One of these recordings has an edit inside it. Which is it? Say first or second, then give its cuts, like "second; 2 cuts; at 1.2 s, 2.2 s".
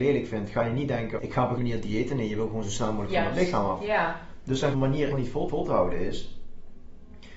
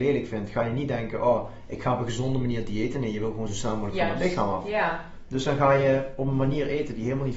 first; 5 cuts; at 1.2 s, 1.6 s, 4.7 s, 5.1 s, 5.5 s